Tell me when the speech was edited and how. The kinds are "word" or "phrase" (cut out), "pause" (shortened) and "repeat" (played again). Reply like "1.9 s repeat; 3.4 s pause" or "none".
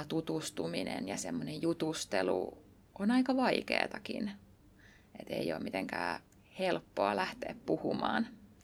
none